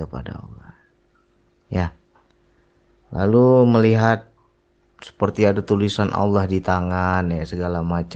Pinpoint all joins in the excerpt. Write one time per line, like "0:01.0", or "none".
none